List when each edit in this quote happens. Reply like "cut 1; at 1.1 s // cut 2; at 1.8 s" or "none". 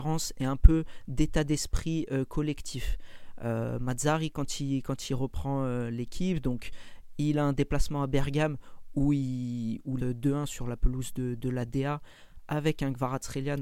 cut 1; at 10.0 s